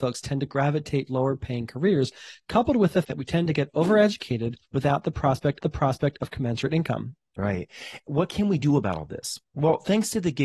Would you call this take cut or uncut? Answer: cut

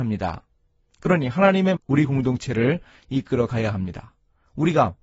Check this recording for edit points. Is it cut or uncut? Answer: cut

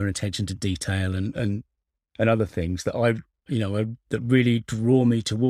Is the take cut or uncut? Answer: uncut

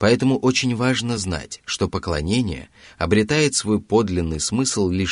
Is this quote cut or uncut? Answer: uncut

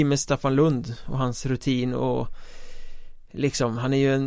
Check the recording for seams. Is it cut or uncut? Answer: uncut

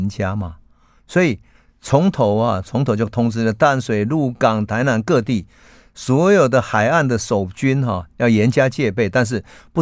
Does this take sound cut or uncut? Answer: uncut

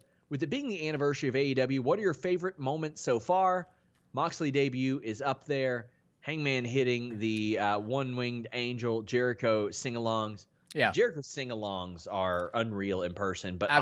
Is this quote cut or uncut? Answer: uncut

